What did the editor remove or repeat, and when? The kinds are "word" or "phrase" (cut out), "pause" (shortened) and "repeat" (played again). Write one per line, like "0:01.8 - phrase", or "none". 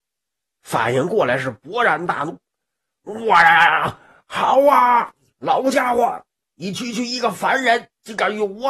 none